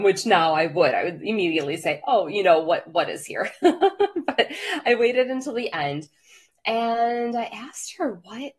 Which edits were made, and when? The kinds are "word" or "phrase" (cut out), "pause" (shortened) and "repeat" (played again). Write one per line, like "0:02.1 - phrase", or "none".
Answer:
none